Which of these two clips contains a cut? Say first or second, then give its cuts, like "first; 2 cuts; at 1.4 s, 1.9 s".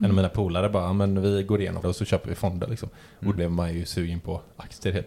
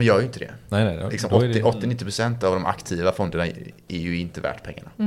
first; 2 cuts; at 1.8 s, 3.4 s